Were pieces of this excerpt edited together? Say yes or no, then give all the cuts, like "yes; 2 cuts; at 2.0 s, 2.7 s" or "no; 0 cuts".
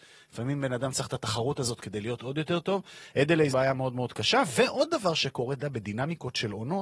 yes; 1 cut; at 3.5 s